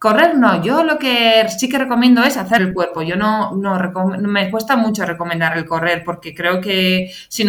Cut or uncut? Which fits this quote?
cut